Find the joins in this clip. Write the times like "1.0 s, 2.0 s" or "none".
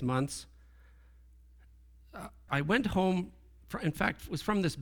2.5 s, 3.6 s